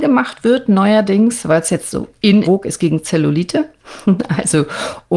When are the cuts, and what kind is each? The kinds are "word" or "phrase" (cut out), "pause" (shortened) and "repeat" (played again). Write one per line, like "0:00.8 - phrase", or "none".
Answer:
0:02.4 - phrase